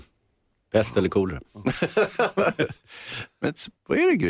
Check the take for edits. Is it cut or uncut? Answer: uncut